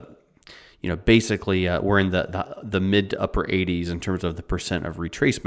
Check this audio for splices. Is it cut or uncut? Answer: uncut